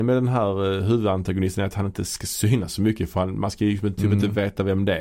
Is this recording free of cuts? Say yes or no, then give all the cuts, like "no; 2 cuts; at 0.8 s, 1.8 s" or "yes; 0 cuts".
yes; 0 cuts